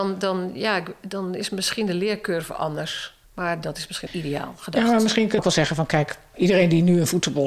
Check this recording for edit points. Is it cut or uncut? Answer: cut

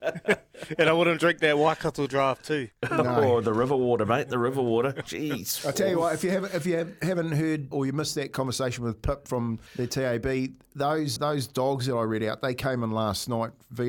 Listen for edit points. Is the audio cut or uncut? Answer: cut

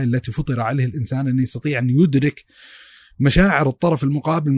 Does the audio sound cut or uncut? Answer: uncut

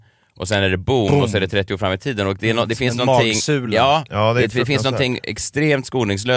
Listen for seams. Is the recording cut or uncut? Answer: uncut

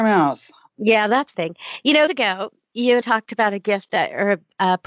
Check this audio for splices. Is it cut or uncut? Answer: cut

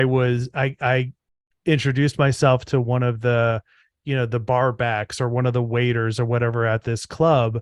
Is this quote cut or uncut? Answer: uncut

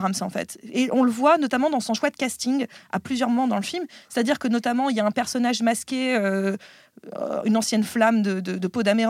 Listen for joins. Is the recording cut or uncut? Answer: uncut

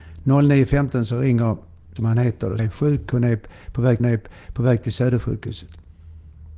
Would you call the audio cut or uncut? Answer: cut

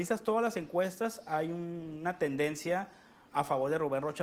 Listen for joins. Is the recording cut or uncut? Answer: uncut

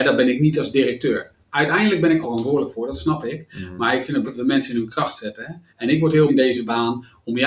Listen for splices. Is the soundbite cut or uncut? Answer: cut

